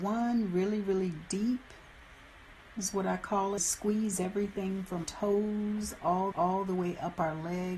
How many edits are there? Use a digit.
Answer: 4